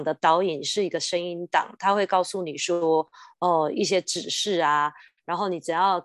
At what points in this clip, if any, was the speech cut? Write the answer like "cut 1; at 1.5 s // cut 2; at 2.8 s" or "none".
none